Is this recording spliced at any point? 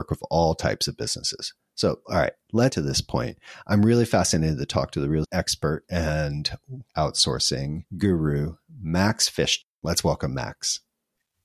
yes; 4 cuts; at 2.7 s, 5.2 s, 6.9 s, 9.7 s

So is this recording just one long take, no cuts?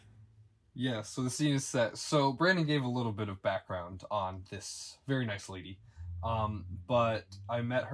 yes; 0 cuts

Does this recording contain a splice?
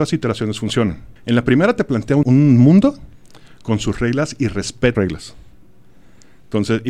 yes; 3 cuts; at 1.2 s, 2.2 s, 4.9 s

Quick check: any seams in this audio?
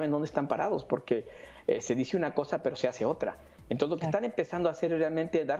no; 0 cuts

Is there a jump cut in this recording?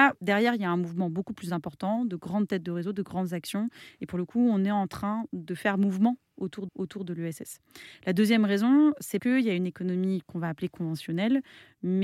yes; 2 cuts; at 6.7 s, 9.2 s

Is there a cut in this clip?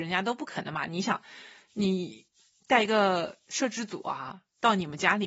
no; 0 cuts

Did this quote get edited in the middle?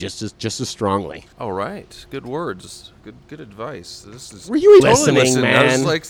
yes; 3 cuts; at 1.3 s, 4.3 s, 4.8 s

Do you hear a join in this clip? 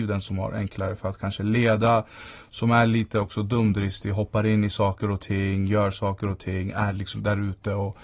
no; 0 cuts

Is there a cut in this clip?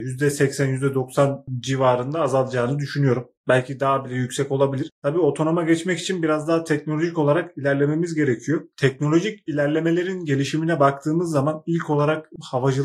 yes; 1 cut; at 3.4 s

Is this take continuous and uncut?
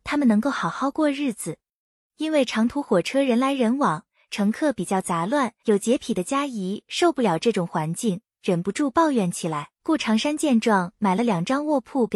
no; 2 cuts; at 5.6 s, 9.8 s

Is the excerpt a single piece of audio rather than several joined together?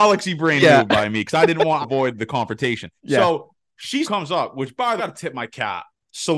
no; 4 cuts; at 1.8 s, 3.0 s, 4.0 s, 5.0 s

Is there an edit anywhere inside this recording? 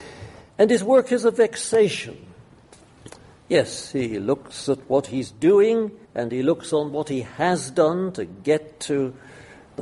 yes; 1 cut; at 6.0 s

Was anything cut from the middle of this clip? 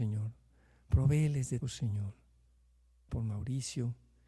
yes; 2 cuts; at 1.6 s, 3.1 s

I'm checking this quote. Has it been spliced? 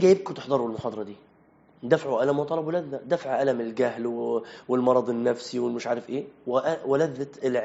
no; 0 cuts

